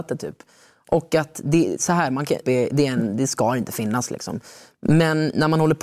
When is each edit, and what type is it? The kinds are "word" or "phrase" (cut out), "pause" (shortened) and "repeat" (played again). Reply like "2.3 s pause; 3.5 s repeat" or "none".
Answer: 2.4 s phrase